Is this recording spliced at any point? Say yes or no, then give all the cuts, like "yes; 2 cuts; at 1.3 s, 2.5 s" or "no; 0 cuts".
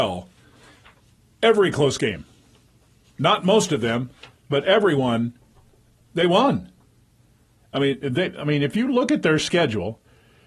no; 0 cuts